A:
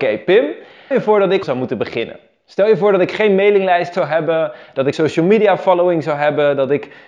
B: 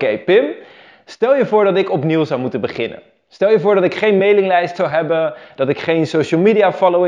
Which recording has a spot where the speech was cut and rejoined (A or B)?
A